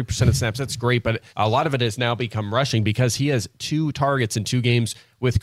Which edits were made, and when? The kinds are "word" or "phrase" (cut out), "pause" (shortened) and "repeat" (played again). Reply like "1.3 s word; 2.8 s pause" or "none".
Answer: 1.3 s pause

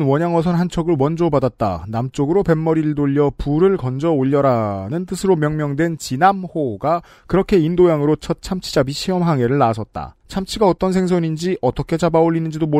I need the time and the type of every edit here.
10.2 s pause

